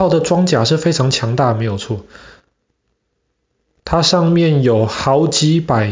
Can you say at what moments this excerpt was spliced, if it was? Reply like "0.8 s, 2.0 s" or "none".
none